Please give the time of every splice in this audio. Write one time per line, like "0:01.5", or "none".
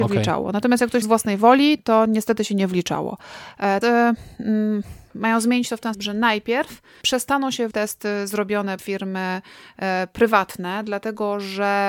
0:01.0
0:03.8
0:05.9
0:07.0
0:07.7
0:08.8